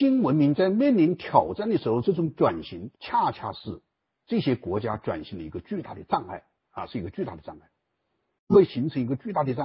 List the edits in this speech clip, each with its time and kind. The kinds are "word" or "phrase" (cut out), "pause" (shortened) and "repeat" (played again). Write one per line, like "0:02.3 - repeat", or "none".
0:03.0 - pause
0:04.0 - pause